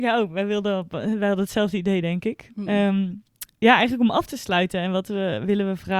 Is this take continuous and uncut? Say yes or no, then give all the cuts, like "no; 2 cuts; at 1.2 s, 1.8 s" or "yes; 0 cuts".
no; 1 cut; at 3.5 s